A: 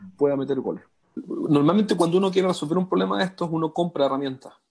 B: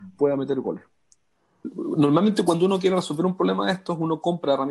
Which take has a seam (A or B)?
A